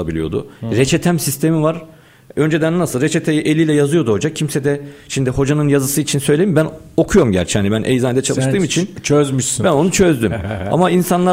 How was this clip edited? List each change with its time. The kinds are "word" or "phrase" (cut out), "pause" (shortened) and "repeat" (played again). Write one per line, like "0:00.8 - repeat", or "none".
none